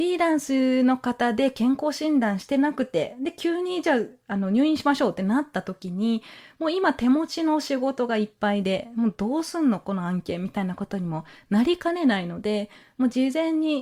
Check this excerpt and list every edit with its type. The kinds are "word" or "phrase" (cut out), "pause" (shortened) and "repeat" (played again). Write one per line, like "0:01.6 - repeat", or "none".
none